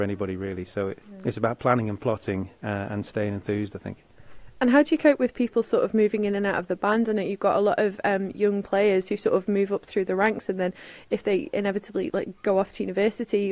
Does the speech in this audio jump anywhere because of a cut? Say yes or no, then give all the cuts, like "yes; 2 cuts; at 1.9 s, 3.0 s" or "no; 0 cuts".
yes; 1 cut; at 1.0 s